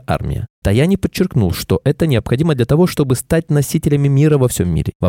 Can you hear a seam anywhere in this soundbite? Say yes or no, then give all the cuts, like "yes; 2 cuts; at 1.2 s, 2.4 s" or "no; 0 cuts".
no; 0 cuts